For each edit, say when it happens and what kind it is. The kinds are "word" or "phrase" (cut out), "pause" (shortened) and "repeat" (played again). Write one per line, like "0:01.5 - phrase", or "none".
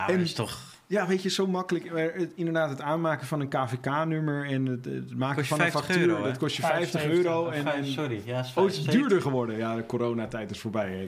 none